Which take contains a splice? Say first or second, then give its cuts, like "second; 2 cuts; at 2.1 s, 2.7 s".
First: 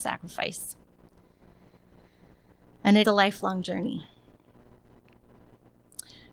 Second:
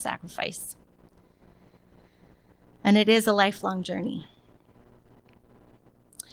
first; 1 cut; at 3.0 s